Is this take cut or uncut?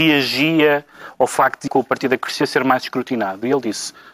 cut